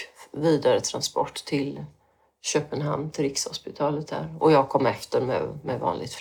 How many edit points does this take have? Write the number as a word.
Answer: zero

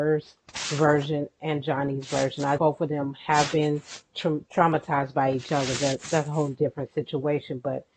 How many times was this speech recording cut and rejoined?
two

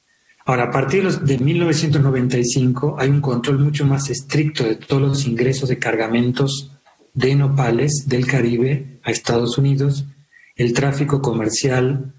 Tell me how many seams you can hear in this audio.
zero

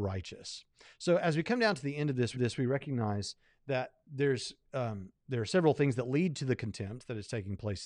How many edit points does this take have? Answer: two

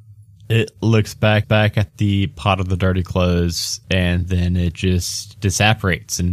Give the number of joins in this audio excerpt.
one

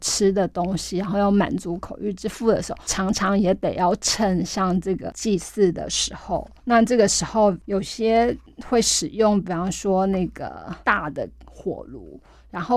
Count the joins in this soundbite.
one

